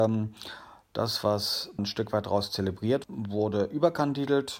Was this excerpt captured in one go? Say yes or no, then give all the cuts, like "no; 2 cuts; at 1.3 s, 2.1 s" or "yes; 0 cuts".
no; 2 cuts; at 1.8 s, 3.0 s